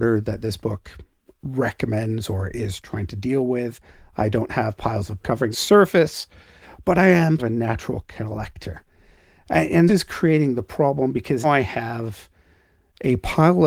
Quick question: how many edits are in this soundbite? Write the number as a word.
five